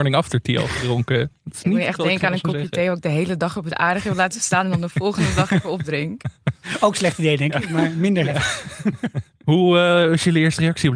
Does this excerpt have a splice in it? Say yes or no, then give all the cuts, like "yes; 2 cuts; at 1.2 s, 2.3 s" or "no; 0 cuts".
no; 0 cuts